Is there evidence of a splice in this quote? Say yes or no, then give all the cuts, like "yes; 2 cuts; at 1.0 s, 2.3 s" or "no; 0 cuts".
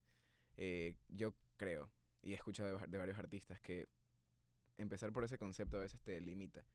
no; 0 cuts